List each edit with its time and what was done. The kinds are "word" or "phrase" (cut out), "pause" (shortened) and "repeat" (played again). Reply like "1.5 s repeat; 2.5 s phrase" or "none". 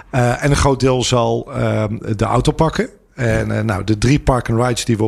none